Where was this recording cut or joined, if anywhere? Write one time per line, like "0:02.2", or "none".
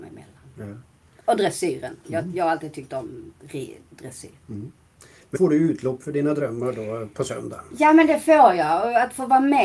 0:02.0
0:04.4
0:05.3